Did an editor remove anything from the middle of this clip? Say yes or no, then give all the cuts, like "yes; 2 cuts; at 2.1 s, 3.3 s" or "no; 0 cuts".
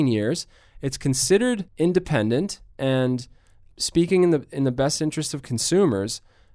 yes; 1 cut; at 1.7 s